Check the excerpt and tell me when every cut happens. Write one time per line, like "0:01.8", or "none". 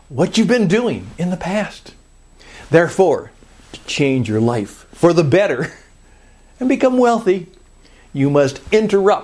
none